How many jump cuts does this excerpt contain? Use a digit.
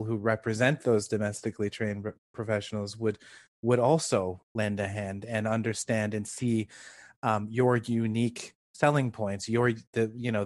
0